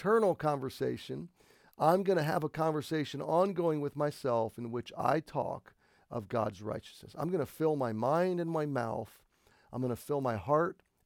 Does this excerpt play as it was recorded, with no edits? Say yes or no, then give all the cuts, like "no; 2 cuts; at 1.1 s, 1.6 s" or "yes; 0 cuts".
yes; 0 cuts